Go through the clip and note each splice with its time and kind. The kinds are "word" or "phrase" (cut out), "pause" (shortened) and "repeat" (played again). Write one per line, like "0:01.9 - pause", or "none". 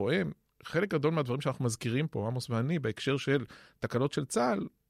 none

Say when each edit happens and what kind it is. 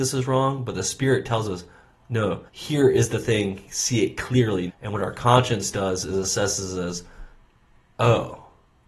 0:02.5 - pause
0:04.7 - word

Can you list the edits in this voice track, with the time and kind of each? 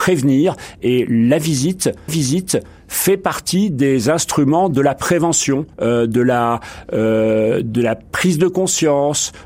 0:02.1 - repeat
0:05.7 - pause

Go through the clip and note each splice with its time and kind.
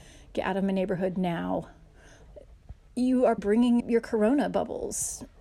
0:02.3 - word
0:03.4 - word
0:03.8 - word

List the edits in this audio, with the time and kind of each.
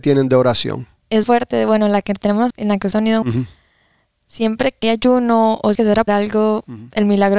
0:01.2 - word
0:02.5 - word
0:02.9 - word
0:03.2 - word
0:04.8 - word
0:05.7 - word
0:06.1 - word

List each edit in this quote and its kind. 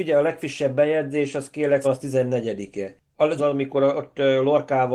0:01.8 - word
0:03.4 - phrase

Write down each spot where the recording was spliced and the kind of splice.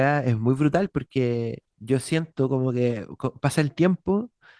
0:01.7 - pause

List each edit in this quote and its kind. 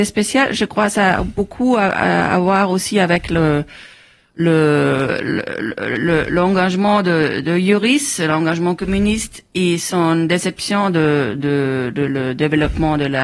none

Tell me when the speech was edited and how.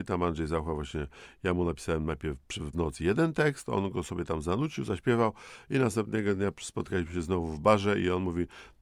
0:02.7 - word

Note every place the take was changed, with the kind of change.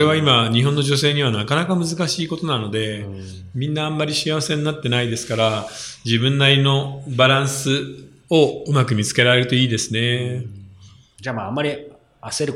none

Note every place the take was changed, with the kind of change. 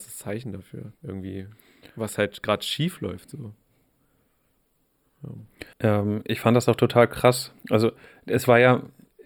0:01.0 - pause
0:05.7 - pause
0:07.6 - pause

